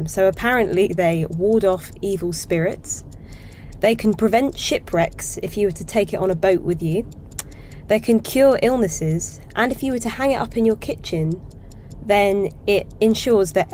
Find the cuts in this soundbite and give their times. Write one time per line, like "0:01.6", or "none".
none